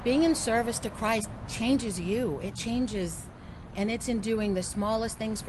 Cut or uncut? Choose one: cut